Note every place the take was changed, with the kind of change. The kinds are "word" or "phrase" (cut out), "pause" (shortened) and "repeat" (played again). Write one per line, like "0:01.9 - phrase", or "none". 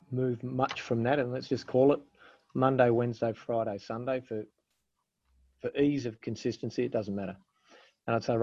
none